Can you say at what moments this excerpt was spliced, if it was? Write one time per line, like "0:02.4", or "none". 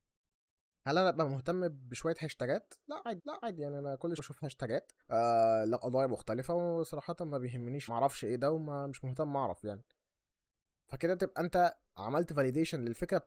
0:03.2
0:04.2
0:05.0
0:07.9
0:11.8